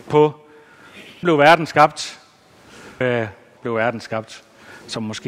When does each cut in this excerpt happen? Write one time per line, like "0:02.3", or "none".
0:01.2
0:03.0
0:03.6